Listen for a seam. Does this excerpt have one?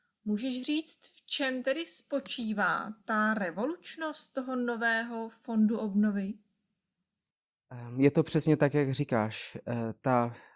no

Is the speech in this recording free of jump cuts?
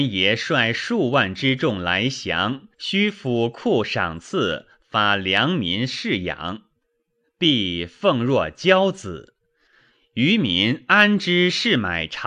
no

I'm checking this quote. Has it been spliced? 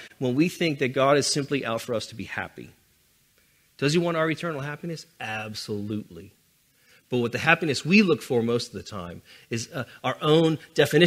no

